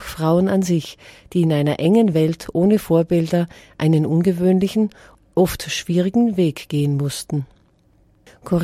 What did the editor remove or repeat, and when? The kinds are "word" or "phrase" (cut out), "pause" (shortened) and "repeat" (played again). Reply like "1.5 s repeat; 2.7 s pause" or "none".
none